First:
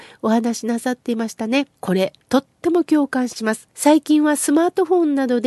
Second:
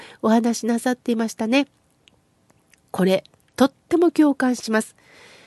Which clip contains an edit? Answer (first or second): first